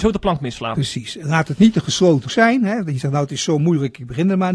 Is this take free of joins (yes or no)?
no